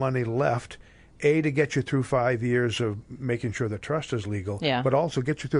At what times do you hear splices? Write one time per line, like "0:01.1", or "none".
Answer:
none